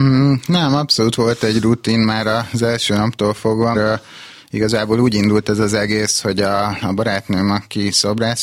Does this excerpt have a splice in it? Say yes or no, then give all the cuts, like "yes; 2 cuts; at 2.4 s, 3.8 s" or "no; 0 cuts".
yes; 1 cut; at 3.7 s